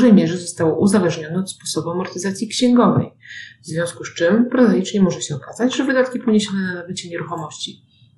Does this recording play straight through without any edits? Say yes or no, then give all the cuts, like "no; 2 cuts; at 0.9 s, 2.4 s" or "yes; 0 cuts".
yes; 0 cuts